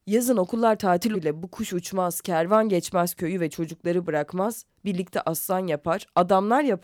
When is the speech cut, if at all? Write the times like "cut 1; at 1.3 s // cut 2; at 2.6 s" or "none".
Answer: cut 1; at 1.1 s